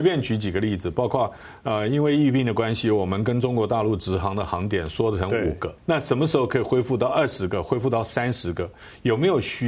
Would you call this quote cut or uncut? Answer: cut